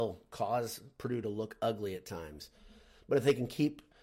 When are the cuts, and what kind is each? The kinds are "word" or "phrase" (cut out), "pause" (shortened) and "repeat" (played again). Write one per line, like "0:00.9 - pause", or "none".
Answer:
none

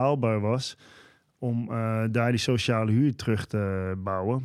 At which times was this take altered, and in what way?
none

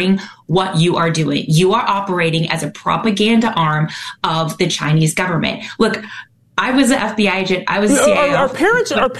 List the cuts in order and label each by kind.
none

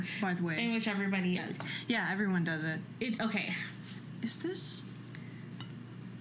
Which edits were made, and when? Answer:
0:01.4 - word
0:03.2 - word

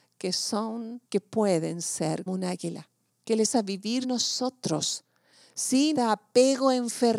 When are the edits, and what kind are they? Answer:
0:01.0 - pause
0:02.3 - word
0:03.1 - pause
0:03.5 - word
0:04.0 - word
0:05.9 - word

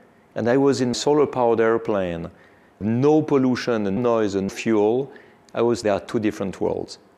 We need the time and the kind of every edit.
0:00.9 - word
0:02.8 - word
0:04.0 - word
0:04.5 - word
0:05.8 - word

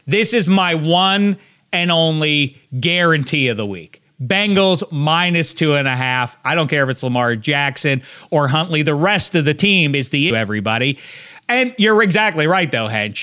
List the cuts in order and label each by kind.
0:10.3 - word

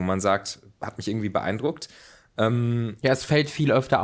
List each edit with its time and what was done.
none

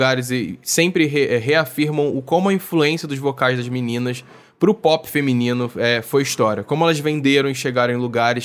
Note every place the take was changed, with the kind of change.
none

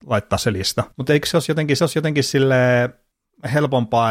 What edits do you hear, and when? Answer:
0:00.9 - pause
0:01.8 - repeat

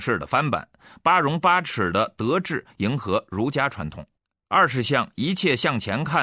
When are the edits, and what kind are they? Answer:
0:04.2 - pause

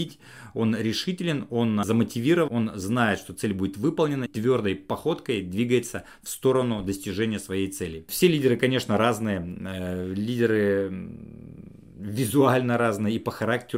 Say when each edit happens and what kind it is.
0:02.5 - word
0:04.3 - word

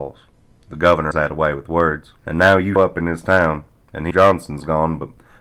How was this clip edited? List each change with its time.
0:01.1 - word
0:02.2 - pause
0:02.8 - word
0:04.1 - word

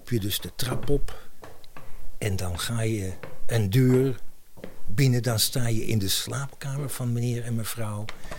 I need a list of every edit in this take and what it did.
none

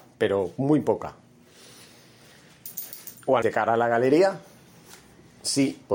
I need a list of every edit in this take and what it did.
0:03.4 - word

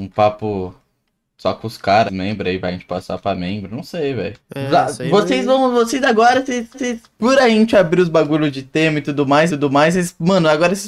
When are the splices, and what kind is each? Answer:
0:02.1 - phrase
0:04.4 - pause
0:06.7 - repeat
0:09.5 - repeat

